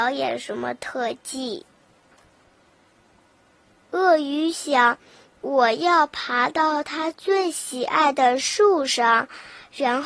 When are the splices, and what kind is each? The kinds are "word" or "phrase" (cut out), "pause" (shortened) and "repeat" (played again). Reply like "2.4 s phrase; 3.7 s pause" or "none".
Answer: none